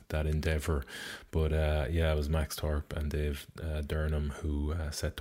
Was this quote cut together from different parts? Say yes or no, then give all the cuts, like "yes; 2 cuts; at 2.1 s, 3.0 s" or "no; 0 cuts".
no; 0 cuts